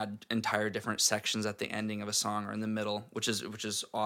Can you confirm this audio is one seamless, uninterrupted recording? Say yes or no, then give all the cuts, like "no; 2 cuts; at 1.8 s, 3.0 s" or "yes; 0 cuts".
yes; 0 cuts